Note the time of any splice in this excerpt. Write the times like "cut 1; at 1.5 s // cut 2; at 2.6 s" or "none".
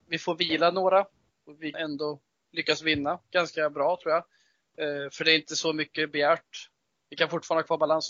cut 1; at 1.7 s